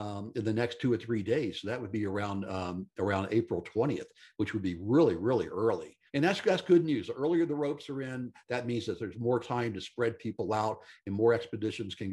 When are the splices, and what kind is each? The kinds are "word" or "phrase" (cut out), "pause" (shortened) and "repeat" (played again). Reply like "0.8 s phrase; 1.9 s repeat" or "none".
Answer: 6.1 s pause